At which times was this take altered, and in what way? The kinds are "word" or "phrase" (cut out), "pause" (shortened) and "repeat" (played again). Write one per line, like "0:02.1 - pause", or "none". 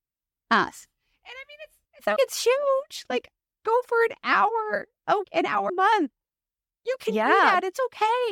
0:01.9 - pause
0:02.2 - word
0:05.2 - word
0:05.7 - word